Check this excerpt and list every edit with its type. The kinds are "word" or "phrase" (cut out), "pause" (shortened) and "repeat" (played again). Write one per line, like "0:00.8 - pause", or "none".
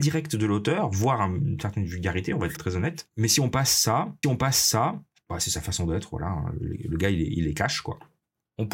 0:02.6 - word
0:04.2 - repeat